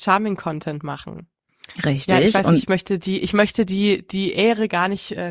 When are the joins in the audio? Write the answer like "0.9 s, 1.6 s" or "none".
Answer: 1.7 s

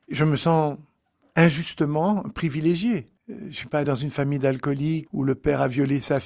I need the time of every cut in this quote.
3.2 s, 3.8 s, 5.1 s

